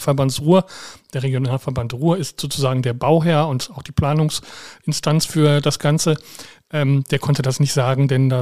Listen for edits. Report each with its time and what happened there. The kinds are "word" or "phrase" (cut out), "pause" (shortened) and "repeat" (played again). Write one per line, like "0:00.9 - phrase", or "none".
none